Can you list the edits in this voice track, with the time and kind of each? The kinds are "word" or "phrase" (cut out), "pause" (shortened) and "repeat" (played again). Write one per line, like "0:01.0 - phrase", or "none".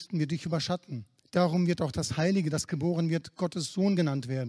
0:01.2 - pause